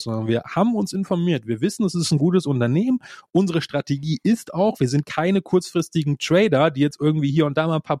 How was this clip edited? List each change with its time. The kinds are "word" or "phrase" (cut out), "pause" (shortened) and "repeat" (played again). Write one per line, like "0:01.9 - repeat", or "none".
none